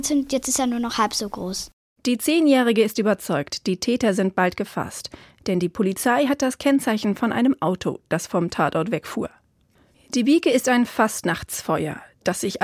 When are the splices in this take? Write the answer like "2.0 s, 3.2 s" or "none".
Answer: none